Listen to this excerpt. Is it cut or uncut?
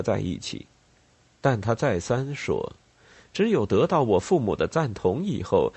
uncut